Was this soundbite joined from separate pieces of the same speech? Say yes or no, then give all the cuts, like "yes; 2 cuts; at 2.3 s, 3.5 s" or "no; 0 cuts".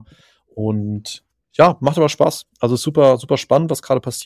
no; 0 cuts